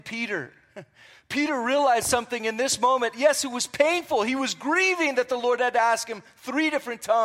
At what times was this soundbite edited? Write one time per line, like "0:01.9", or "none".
none